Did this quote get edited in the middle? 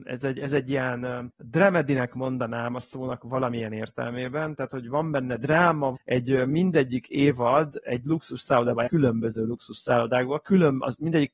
yes; 2 cuts; at 5.9 s, 8.9 s

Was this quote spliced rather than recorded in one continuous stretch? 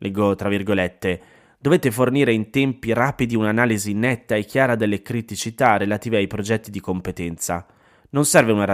no; 0 cuts

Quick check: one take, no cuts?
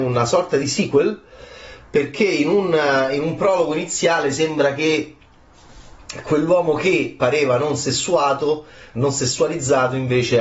yes; 0 cuts

